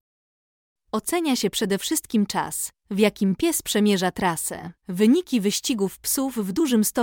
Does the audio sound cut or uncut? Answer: cut